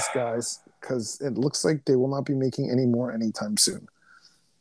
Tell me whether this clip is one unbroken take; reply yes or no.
yes